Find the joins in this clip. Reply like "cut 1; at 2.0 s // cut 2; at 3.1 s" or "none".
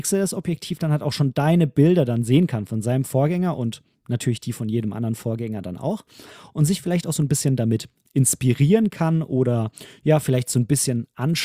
none